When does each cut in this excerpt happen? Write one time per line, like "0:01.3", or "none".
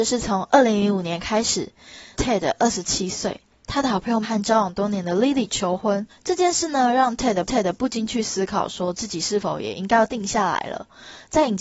0:02.1
0:04.2
0:06.1
0:07.5